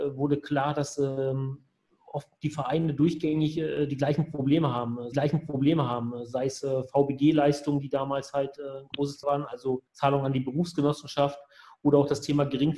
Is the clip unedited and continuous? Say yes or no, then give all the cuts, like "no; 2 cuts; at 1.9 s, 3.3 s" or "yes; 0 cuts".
no; 3 cuts; at 5.1 s, 9.2 s, 9.9 s